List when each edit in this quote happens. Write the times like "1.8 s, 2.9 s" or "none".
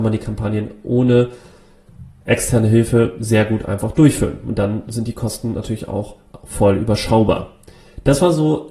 none